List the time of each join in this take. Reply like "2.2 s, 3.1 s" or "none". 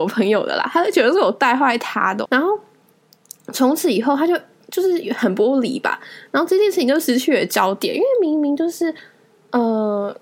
2.3 s